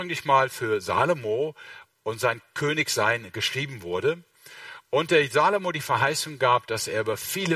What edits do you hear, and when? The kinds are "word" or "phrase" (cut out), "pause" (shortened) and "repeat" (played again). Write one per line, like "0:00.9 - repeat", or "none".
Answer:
none